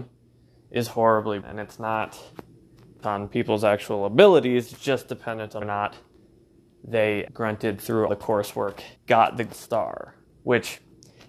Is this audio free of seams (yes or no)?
no